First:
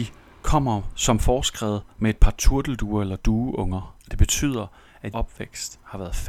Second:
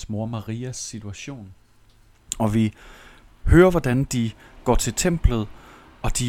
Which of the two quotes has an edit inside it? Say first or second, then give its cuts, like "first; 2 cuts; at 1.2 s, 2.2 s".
first; 2 cuts; at 4.0 s, 5.1 s